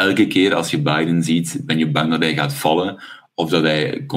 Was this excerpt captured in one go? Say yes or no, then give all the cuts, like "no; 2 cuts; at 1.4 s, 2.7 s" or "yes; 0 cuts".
yes; 0 cuts